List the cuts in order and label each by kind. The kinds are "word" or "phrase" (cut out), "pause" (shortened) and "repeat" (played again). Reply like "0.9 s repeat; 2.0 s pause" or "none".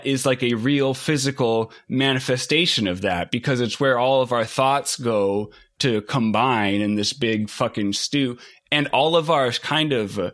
none